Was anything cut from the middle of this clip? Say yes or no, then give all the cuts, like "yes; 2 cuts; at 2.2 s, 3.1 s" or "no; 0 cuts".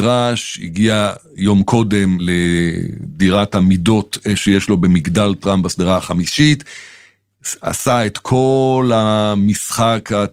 no; 0 cuts